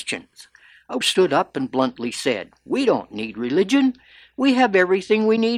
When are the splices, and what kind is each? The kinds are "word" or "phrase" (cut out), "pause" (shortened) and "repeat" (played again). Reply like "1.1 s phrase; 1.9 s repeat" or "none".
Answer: 1.0 s word